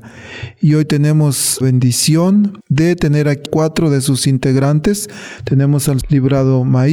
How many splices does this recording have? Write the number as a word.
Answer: three